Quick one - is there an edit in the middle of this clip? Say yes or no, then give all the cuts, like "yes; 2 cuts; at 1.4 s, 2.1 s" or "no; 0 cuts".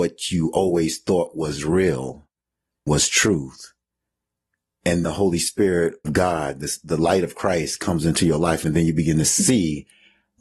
yes; 3 cuts; at 2.9 s, 5.0 s, 6.0 s